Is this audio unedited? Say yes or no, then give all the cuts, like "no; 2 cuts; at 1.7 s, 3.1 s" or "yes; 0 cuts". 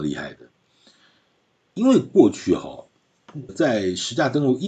no; 1 cut; at 3.5 s